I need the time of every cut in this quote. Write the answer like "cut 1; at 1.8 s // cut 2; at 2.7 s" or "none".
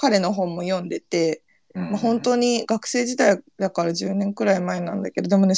none